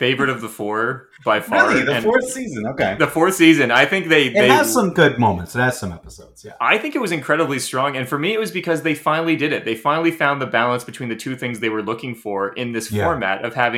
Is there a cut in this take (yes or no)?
no